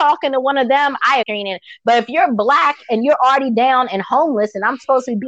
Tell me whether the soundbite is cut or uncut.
cut